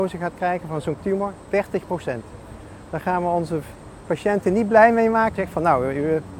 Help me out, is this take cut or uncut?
cut